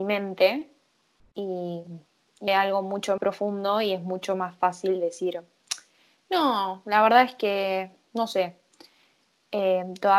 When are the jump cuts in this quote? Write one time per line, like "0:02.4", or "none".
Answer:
0:02.5
0:03.2